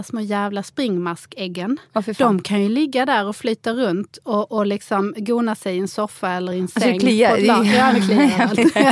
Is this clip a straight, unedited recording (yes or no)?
yes